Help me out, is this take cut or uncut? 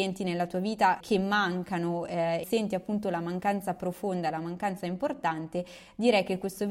cut